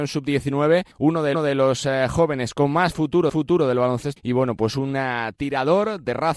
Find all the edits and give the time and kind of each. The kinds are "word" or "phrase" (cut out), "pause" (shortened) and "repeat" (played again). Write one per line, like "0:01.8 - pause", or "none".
0:00.9 - pause
0:01.3 - repeat
0:03.3 - repeat
0:04.2 - word